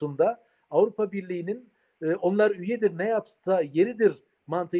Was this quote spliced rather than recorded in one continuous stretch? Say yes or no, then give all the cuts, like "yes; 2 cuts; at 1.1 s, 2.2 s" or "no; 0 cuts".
no; 0 cuts